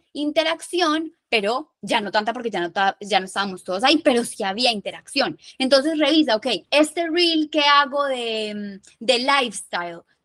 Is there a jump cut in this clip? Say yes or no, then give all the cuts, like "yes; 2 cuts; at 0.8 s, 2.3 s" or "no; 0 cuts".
yes; 1 cut; at 6.6 s